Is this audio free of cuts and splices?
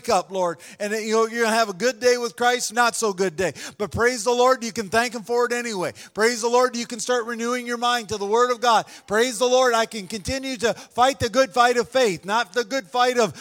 no; 1 cut; at 2.7 s

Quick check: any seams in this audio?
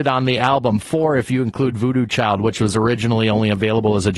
no; 0 cuts

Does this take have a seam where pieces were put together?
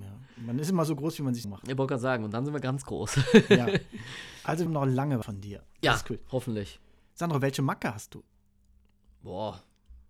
yes; 3 cuts; at 1.4 s, 4.7 s, 5.2 s

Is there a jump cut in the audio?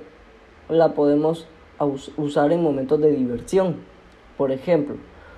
no; 0 cuts

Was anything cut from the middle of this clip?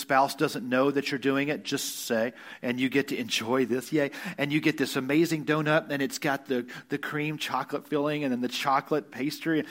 no; 0 cuts

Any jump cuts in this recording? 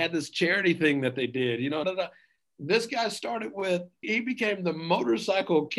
yes; 2 cuts; at 1.8 s, 4.0 s

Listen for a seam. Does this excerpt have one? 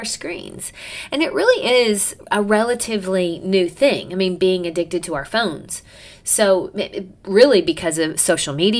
no; 0 cuts

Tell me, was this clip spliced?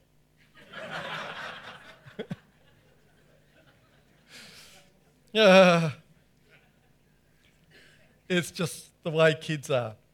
no; 0 cuts

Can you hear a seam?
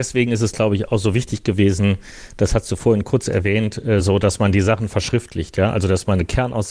no; 0 cuts

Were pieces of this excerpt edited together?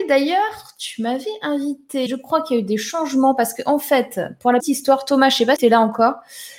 yes; 3 cuts; at 2.1 s, 4.6 s, 5.6 s

